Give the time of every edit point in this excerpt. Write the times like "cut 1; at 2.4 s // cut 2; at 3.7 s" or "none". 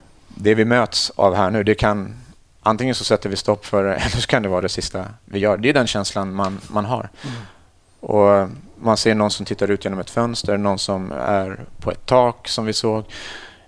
none